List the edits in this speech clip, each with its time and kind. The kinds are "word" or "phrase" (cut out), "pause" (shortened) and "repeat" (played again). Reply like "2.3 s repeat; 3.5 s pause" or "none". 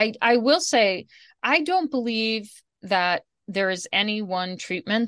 none